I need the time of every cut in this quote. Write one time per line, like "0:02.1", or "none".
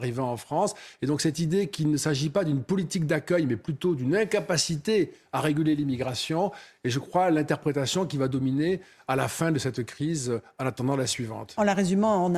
none